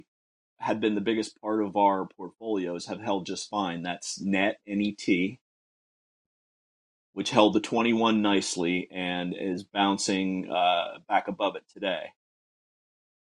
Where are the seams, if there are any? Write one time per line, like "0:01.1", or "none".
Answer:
none